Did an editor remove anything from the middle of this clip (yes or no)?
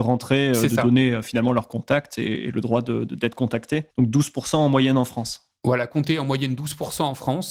yes